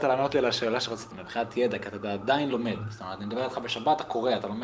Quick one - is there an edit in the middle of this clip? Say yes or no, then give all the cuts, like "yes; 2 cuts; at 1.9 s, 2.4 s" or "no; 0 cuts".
yes; 1 cut; at 1.1 s